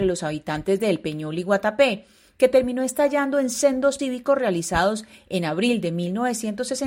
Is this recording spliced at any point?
yes; 1 cut; at 4.0 s

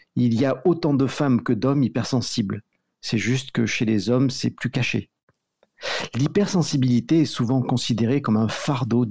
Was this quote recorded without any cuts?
yes; 0 cuts

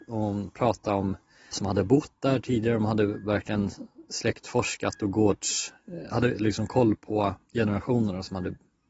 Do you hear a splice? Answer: yes; 2 cuts; at 1.5 s, 7.4 s

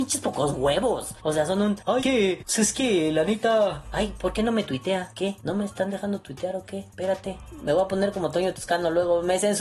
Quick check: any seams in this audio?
yes; 1 cut; at 2.0 s

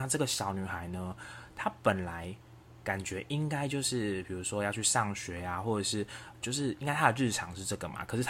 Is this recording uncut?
no; 1 cut; at 6.4 s

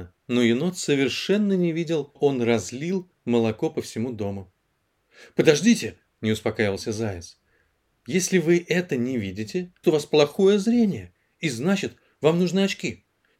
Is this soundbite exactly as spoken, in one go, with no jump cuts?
no; 2 cuts; at 2.2 s, 9.8 s

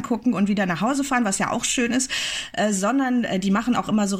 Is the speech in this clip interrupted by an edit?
no; 0 cuts

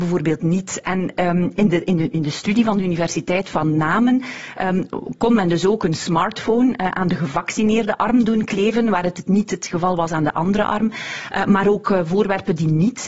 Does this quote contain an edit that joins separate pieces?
no; 0 cuts

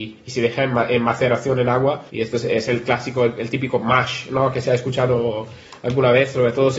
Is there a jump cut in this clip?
yes; 1 cut; at 2.1 s

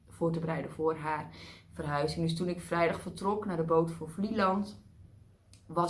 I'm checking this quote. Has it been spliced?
no; 0 cuts

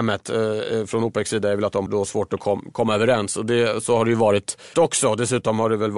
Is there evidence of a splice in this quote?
yes; 2 cuts; at 1.9 s, 4.7 s

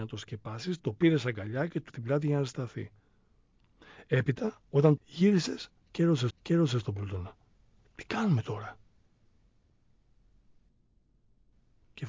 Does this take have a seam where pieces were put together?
yes; 3 cuts; at 1.9 s, 5.0 s, 6.3 s

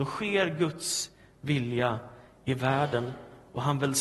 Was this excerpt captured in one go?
yes; 0 cuts

